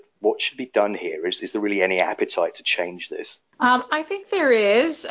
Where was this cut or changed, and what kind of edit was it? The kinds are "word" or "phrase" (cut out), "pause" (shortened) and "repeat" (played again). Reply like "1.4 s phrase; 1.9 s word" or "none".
3.4 s pause